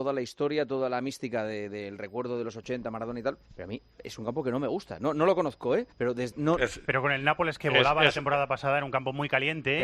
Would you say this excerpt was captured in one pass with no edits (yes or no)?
no